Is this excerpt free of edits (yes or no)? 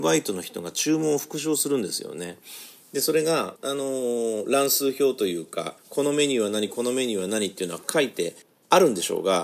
no